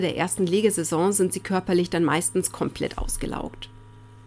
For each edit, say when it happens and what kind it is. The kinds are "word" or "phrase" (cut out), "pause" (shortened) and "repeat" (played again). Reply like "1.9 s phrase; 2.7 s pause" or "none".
none